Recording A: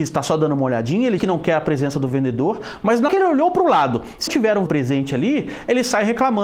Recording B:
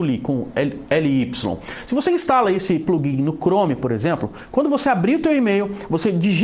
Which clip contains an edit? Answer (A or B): A